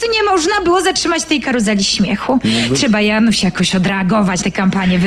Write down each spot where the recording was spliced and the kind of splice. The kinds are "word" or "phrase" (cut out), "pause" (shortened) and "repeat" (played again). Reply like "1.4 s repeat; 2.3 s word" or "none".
none